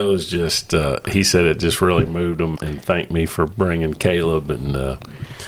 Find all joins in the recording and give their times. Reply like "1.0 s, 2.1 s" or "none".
2.5 s